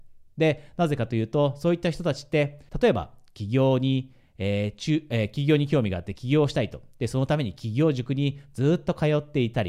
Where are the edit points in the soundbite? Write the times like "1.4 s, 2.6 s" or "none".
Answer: 2.7 s